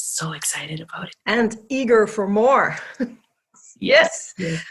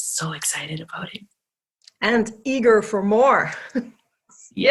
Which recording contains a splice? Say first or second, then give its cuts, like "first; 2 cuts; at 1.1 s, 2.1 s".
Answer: first; 1 cut; at 1.1 s